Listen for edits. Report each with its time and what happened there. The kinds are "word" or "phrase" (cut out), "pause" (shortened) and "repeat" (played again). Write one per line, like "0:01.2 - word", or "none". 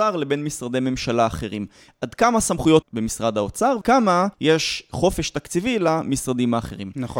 0:02.8 - word
0:03.8 - word
0:04.3 - pause